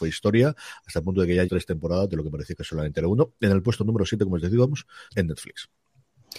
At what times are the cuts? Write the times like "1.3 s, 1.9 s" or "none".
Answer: 1.5 s, 5.1 s

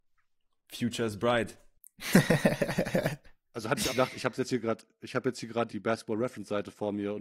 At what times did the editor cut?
3.9 s, 5.7 s

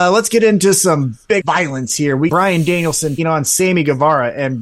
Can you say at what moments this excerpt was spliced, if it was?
1.4 s, 2.3 s, 3.2 s

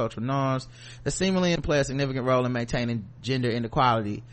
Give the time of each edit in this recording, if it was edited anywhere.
1.6 s

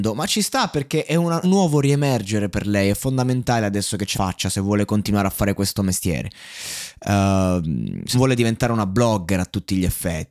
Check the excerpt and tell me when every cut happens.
1.4 s, 4.1 s, 8.1 s

